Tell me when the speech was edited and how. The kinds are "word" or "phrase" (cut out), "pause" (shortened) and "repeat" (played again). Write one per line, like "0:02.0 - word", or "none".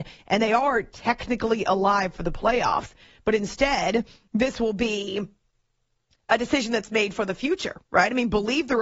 none